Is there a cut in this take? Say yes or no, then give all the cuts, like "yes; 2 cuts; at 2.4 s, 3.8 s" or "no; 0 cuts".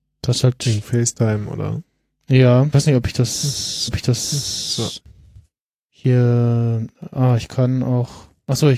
yes; 2 cuts; at 2.7 s, 3.9 s